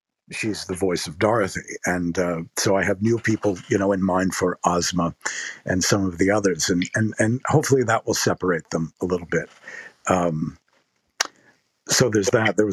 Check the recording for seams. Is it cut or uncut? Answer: uncut